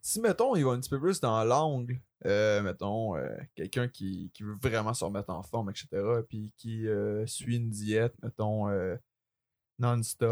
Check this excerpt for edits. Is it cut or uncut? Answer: uncut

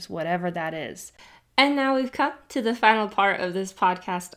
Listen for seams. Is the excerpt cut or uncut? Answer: uncut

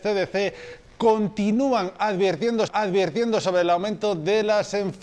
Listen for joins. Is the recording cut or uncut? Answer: cut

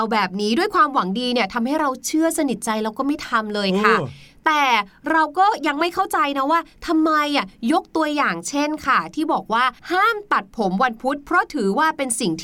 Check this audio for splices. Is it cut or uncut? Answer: cut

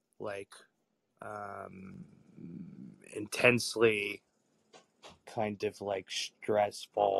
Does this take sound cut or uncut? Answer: cut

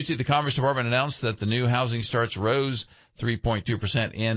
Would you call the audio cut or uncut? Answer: uncut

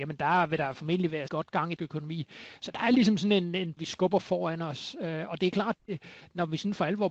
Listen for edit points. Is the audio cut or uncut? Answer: cut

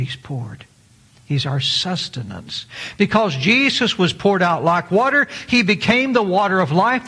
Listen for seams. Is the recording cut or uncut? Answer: uncut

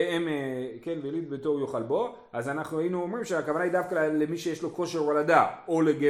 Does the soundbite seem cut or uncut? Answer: uncut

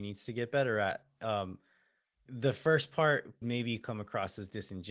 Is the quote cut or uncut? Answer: cut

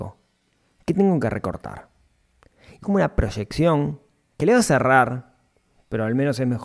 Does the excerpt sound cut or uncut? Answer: cut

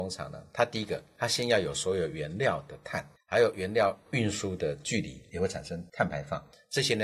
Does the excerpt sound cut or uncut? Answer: uncut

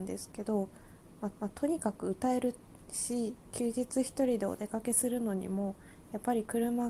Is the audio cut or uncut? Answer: cut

